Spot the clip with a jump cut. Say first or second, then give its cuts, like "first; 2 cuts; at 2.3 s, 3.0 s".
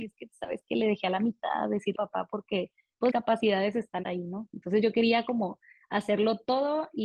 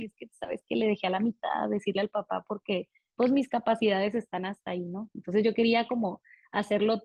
first; 3 cuts; at 1.9 s, 3.1 s, 4.0 s